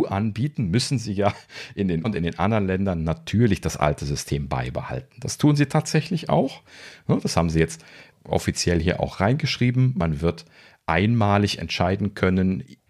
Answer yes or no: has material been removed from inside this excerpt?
yes